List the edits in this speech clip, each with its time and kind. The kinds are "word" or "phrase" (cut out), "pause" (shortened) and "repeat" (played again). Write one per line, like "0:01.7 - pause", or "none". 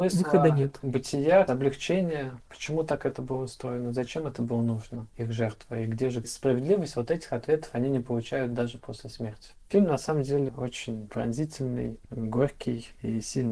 none